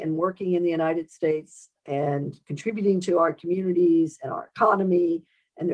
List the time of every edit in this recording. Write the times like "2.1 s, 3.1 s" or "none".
1.8 s